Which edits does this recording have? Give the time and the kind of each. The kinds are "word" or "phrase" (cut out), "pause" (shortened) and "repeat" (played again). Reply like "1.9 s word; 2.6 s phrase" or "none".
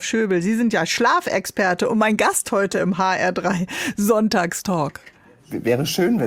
none